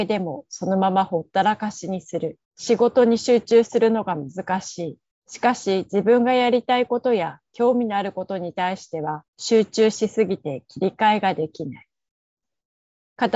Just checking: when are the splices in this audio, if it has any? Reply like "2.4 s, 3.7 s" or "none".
2.4 s, 5.1 s, 9.3 s